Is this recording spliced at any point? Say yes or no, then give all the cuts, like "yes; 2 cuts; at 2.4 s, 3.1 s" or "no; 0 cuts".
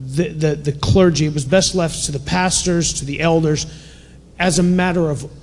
no; 0 cuts